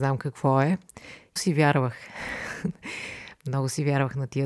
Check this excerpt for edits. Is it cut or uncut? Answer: cut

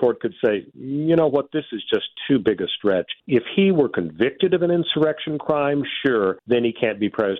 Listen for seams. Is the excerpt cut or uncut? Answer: cut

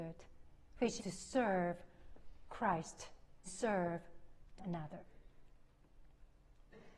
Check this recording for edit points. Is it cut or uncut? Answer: cut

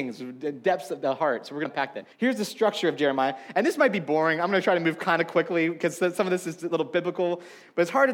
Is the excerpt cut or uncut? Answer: cut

